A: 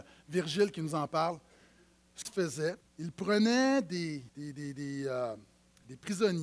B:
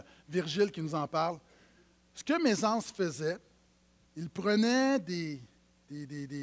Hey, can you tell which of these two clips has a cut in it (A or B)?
A